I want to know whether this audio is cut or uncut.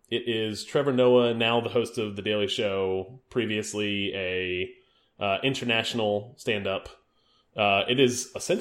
uncut